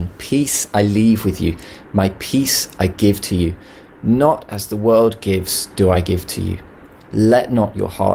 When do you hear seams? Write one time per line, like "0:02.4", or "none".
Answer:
none